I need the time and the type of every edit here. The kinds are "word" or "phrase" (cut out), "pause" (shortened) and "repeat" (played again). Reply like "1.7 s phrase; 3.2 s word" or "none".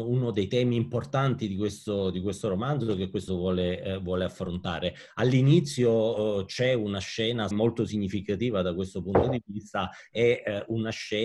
3.3 s word; 7.5 s phrase